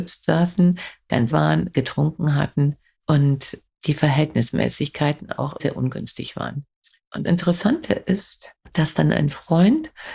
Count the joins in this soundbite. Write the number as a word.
four